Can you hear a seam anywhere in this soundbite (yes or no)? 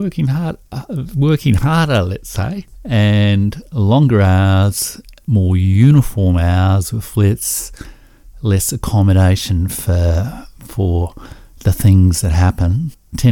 no